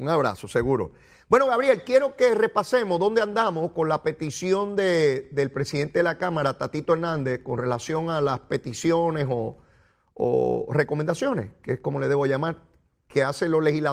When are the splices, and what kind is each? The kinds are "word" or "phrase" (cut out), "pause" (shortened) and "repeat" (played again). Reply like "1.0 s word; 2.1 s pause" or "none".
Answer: none